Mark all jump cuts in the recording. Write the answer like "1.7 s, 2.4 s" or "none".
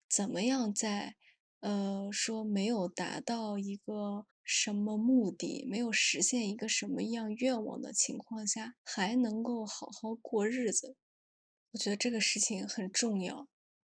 4.3 s